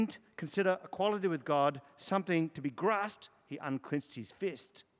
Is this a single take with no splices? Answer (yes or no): yes